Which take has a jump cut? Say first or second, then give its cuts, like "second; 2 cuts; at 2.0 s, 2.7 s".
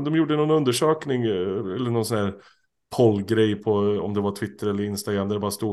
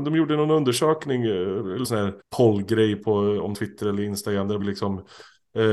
second; 4 cuts; at 1.8 s, 2.2 s, 3.5 s, 4.6 s